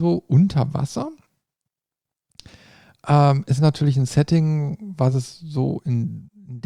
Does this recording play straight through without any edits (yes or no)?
yes